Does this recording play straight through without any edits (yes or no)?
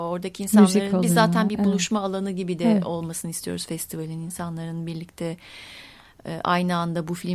yes